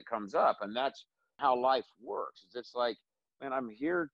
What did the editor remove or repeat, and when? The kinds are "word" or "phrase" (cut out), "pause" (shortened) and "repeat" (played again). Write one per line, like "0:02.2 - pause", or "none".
none